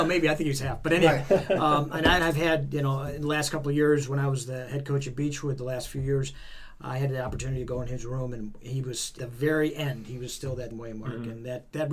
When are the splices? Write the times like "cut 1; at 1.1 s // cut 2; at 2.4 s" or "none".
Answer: cut 1; at 2.2 s // cut 2; at 9.2 s // cut 3; at 10.7 s